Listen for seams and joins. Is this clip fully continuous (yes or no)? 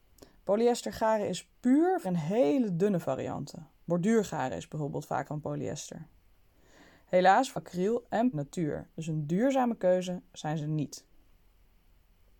no